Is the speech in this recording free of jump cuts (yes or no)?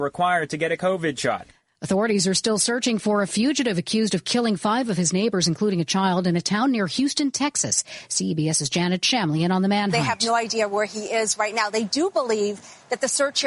yes